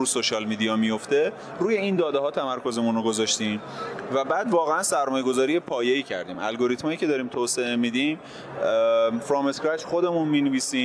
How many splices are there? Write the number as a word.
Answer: zero